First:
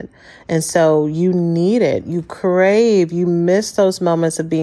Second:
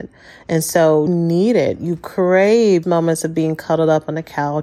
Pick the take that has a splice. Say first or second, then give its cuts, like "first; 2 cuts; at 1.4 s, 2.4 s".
second; 2 cuts; at 1.1 s, 2.8 s